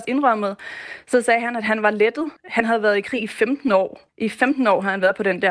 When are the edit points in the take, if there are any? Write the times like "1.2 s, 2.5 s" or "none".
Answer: 2.4 s, 4.1 s